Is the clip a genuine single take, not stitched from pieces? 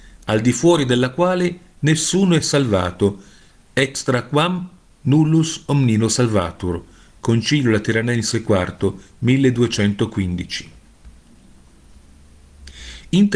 yes; 0 cuts

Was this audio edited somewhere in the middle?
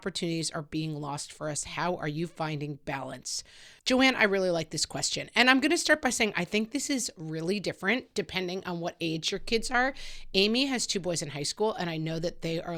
yes; 1 cut; at 3.8 s

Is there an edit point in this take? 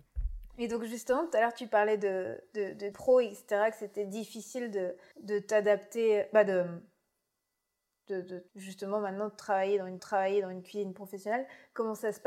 yes; 4 cuts; at 2.9 s, 5.1 s, 8.5 s, 10.0 s

